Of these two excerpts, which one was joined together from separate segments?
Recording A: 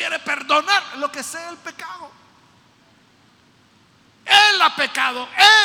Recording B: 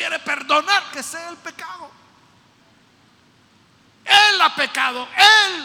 B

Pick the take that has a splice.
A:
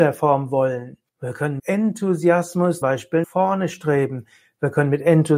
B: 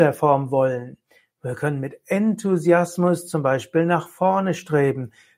A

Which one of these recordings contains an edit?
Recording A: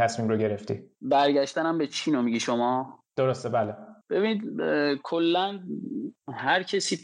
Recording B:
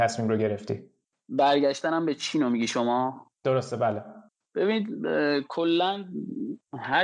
A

